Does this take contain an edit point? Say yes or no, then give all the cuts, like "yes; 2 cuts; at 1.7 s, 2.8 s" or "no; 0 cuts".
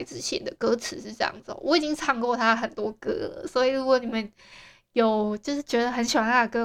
no; 0 cuts